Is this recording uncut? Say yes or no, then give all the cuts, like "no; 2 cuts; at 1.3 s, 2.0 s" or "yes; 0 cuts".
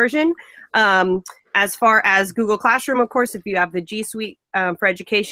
yes; 0 cuts